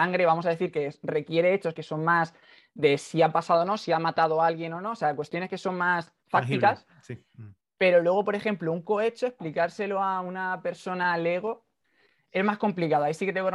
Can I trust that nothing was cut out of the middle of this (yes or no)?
yes